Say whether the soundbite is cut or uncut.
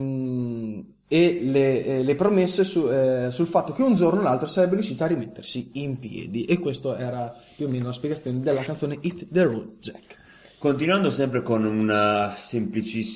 uncut